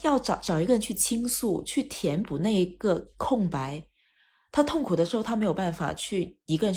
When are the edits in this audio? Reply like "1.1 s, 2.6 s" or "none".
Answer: 3.1 s

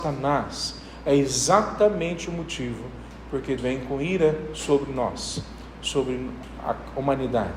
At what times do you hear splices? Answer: 3.6 s

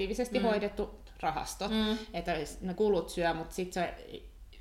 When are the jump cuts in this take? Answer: 2.7 s

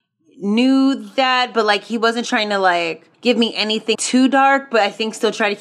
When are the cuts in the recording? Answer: 3.1 s, 3.9 s

